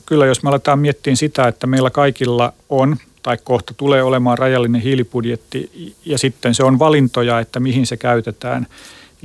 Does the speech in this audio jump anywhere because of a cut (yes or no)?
yes